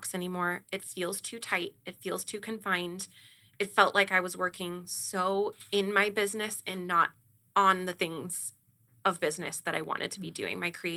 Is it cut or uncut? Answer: uncut